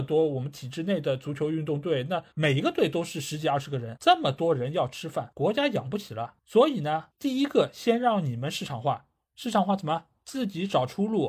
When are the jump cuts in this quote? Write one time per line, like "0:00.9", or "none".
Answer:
0:02.3